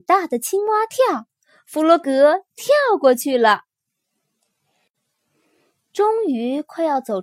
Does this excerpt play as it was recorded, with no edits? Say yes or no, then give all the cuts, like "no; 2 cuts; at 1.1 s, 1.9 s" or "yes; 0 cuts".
yes; 0 cuts